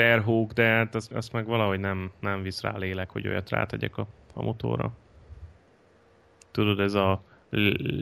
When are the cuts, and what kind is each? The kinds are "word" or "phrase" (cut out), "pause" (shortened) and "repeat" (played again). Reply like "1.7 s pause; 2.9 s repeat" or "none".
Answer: 1.1 s word